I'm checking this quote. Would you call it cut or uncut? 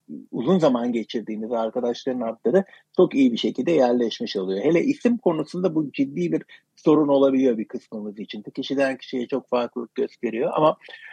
uncut